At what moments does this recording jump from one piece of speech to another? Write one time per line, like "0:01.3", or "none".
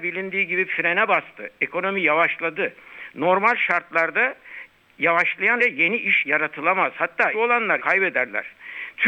0:05.6
0:06.2
0:07.3
0:07.8